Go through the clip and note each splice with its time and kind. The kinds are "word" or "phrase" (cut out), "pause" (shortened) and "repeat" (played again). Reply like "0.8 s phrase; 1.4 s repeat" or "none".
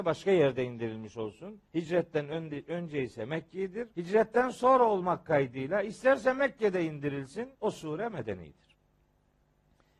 1.7 s pause; 3.9 s pause; 7.5 s pause